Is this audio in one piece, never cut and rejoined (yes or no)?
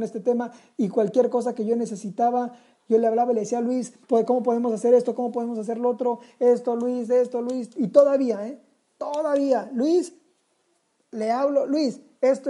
no